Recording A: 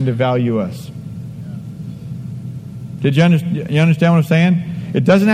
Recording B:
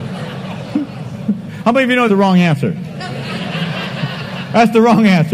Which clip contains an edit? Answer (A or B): B